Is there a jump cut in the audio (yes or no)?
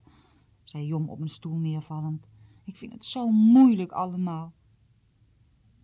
no